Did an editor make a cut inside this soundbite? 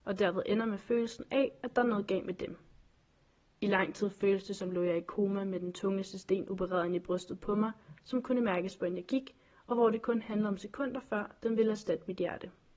no; 0 cuts

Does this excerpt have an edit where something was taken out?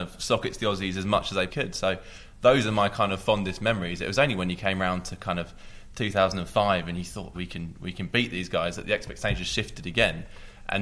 yes; 2 cuts; at 1.5 s, 7.3 s

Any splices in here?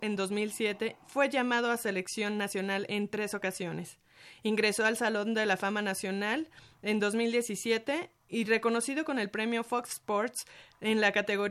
no; 0 cuts

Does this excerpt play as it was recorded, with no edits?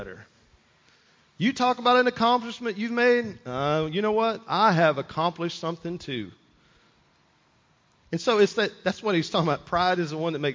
yes; 0 cuts

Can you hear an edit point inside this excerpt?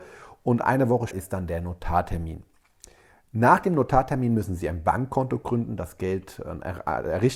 yes; 1 cut; at 1.1 s

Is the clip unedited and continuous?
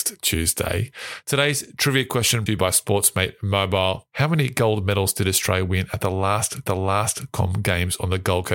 no; 2 cuts; at 2.5 s, 6.7 s

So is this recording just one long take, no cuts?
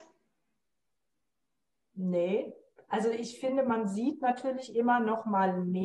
yes; 0 cuts

